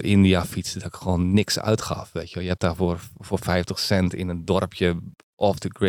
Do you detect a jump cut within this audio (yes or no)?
no